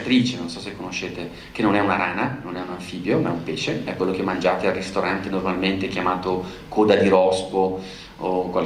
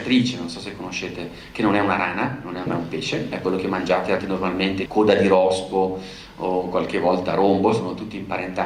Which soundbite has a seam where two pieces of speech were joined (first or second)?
second